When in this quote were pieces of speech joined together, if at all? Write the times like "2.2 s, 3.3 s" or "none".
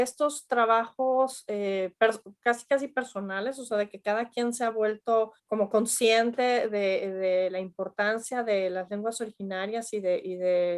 5.4 s